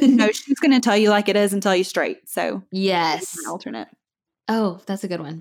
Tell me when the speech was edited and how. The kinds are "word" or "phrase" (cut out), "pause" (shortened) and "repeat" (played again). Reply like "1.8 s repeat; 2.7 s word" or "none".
none